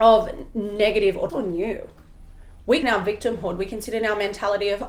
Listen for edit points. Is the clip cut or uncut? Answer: cut